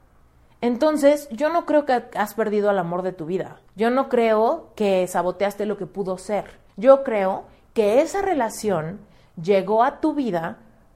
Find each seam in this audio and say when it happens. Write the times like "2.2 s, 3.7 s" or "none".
3.7 s, 6.7 s

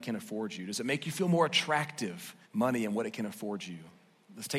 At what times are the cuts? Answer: 2.4 s

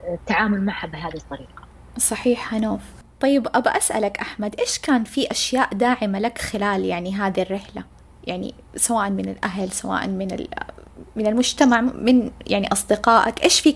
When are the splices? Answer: none

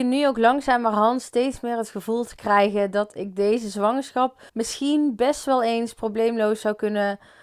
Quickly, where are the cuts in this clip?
4.5 s

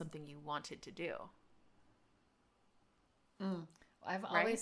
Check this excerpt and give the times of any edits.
none

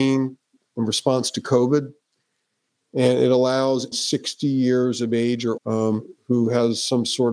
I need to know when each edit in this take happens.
3.9 s, 5.6 s

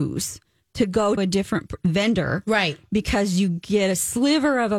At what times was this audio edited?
1.2 s

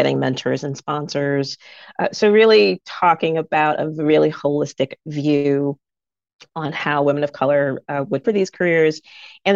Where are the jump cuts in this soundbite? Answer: 8.2 s

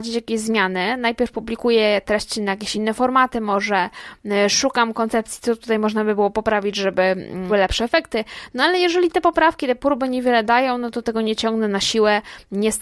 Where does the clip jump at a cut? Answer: 2.7 s, 7.5 s

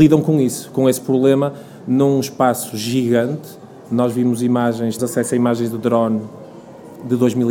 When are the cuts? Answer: 5.0 s

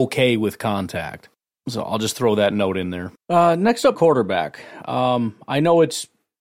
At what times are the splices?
3.2 s, 3.9 s

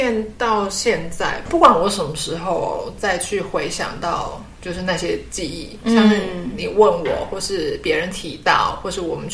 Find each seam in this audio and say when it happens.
none

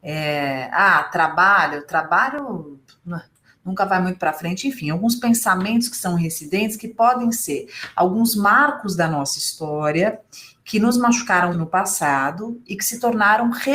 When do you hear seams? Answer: 11.5 s

